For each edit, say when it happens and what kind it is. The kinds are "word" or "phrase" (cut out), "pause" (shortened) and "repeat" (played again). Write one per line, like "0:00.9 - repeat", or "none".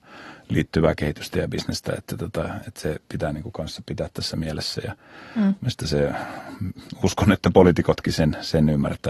none